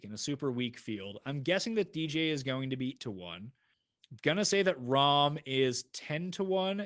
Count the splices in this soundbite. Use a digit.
2